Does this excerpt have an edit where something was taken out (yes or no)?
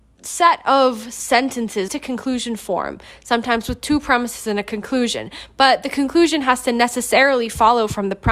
yes